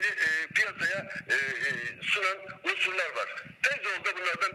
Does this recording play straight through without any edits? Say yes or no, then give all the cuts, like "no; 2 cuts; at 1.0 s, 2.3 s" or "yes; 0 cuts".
yes; 0 cuts